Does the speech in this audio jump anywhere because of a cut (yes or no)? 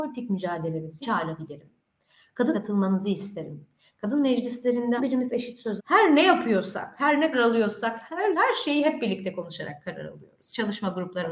yes